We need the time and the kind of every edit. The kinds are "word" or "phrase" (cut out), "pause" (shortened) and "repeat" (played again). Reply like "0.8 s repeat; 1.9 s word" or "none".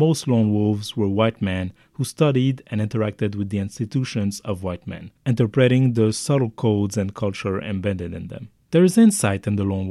8.6 s pause